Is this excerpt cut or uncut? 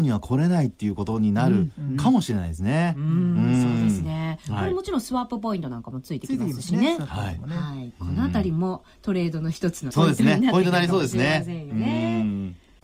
cut